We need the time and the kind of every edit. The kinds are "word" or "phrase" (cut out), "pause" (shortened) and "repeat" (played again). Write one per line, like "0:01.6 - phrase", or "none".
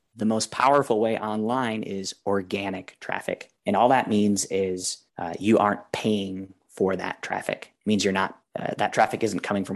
0:03.6 - pause
0:05.1 - pause
0:08.5 - pause